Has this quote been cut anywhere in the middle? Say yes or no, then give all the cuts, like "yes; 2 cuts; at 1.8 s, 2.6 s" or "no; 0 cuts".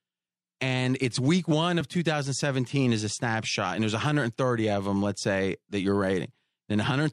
no; 0 cuts